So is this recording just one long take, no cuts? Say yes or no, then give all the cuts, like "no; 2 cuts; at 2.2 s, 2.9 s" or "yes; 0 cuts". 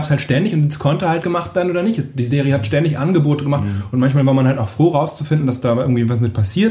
no; 1 cut; at 1.2 s